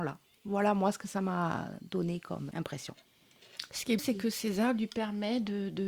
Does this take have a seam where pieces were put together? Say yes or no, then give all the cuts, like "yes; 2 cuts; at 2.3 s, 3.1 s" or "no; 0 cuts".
yes; 2 cuts; at 2.5 s, 4.0 s